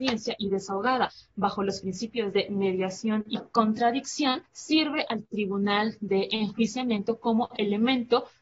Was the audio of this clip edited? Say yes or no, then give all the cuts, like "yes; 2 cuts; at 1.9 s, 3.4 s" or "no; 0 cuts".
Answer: yes; 1 cut; at 4.5 s